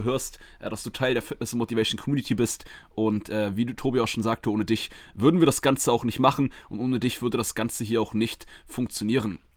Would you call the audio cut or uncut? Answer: uncut